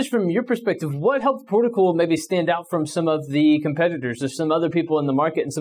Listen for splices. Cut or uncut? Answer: uncut